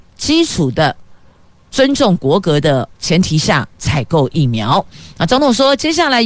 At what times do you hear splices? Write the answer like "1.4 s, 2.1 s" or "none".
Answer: 2.9 s, 3.7 s